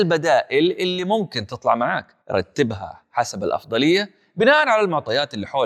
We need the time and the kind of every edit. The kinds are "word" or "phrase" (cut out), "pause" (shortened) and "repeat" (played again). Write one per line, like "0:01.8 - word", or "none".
0:02.2 - pause